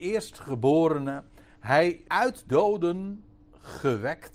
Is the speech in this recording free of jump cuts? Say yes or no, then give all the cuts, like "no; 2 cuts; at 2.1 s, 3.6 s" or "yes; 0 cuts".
no; 2 cuts; at 2.1 s, 2.5 s